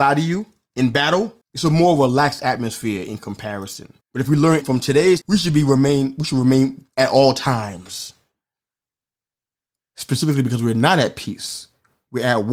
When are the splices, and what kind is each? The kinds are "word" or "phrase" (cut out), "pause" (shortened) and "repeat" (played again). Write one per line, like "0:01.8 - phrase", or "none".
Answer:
0:01.4 - pause
0:04.0 - pause
0:04.6 - word
0:05.2 - word
0:06.9 - word